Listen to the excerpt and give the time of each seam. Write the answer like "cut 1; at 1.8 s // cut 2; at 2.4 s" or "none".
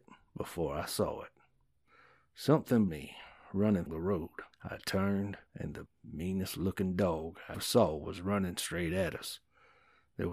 cut 1; at 2.9 s // cut 2; at 3.9 s // cut 3; at 4.5 s // cut 4; at 5.5 s // cut 5; at 5.9 s // cut 6; at 7.5 s